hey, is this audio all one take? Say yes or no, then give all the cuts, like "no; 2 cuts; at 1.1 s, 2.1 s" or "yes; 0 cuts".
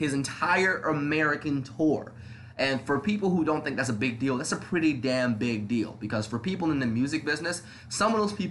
yes; 0 cuts